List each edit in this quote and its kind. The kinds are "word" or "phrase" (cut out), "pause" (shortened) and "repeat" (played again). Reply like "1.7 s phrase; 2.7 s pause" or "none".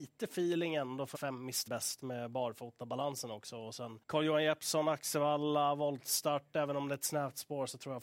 1.1 s phrase; 1.7 s word; 4.0 s pause